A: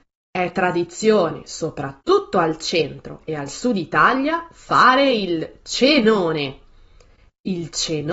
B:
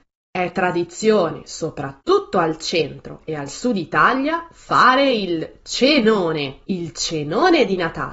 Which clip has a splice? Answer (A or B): B